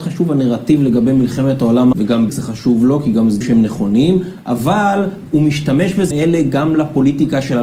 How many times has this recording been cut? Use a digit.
4